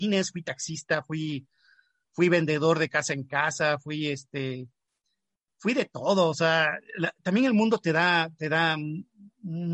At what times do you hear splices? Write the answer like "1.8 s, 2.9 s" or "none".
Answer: none